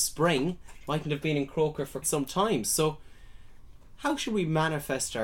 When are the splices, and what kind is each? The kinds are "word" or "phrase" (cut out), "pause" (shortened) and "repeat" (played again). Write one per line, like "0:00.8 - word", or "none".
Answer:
0:02.0 - word